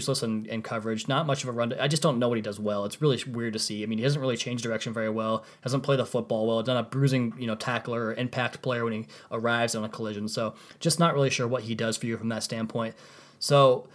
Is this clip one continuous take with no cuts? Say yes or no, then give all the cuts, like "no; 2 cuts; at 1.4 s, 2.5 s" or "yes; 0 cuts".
yes; 0 cuts